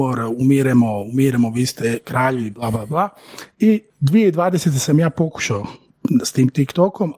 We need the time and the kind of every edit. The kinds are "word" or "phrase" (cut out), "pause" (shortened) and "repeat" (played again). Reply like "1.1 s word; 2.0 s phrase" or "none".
3.9 s pause